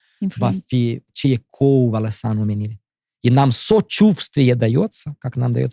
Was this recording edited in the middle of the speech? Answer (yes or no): no